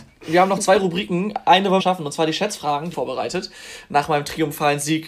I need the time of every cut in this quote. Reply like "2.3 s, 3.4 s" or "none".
1.8 s, 2.9 s